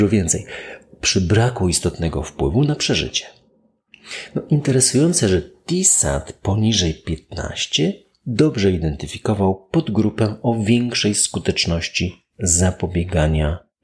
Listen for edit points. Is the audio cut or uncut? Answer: uncut